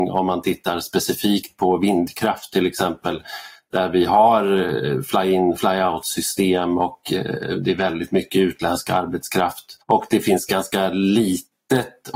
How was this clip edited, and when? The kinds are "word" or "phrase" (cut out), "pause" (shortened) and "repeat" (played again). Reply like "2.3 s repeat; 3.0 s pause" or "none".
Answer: 9.8 s pause